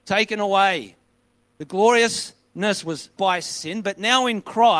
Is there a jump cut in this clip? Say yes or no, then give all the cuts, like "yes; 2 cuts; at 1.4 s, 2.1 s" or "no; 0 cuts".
yes; 1 cut; at 3.2 s